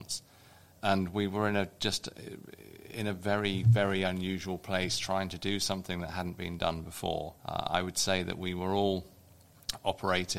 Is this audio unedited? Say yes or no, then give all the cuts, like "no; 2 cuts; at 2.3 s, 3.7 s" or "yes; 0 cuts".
no; 1 cut; at 7.4 s